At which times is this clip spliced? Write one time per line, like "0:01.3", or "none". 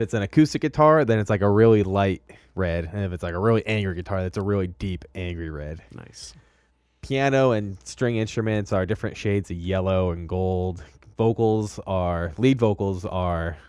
none